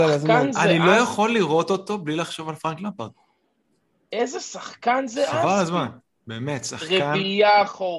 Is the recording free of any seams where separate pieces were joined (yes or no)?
yes